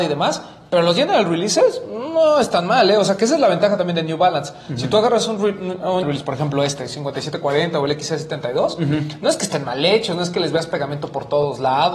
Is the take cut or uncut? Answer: cut